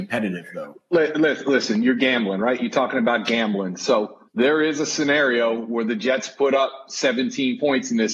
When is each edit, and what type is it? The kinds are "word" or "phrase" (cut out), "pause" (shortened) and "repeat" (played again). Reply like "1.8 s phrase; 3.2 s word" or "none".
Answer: 4.3 s pause